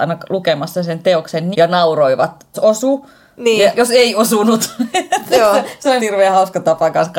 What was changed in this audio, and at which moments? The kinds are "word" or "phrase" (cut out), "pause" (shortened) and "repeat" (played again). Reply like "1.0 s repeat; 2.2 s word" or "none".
1.5 s word; 2.5 s word; 3.7 s word; 6.0 s word